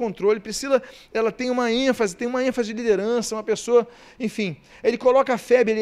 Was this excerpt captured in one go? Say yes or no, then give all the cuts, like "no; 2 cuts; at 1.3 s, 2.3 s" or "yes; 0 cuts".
yes; 0 cuts